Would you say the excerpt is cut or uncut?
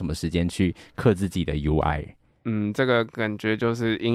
uncut